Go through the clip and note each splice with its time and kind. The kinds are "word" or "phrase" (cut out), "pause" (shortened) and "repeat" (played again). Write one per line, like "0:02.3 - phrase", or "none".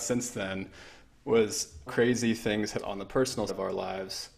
0:01.9 - word
0:02.8 - word
0:03.5 - word